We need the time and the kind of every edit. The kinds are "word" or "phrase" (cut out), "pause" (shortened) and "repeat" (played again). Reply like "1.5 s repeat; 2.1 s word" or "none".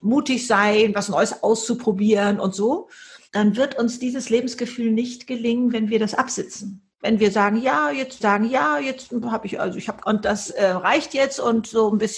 3.3 s pause; 8.2 s repeat; 10.0 s phrase